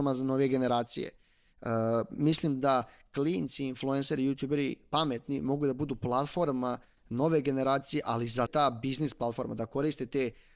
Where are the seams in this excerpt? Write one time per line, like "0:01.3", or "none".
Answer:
0:08.5